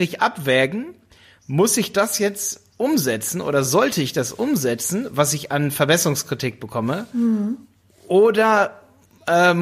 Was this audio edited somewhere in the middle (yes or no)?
no